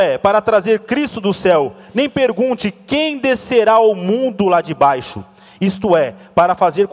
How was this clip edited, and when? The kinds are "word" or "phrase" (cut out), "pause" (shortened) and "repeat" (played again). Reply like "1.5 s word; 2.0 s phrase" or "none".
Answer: none